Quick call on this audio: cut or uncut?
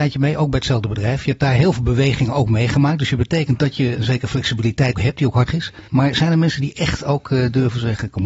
cut